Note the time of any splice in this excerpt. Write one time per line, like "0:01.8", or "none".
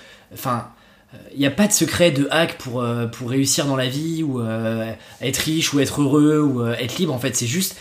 none